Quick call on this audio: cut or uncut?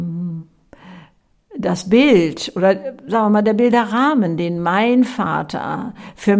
uncut